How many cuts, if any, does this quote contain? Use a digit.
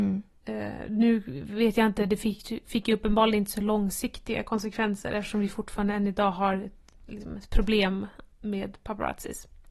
1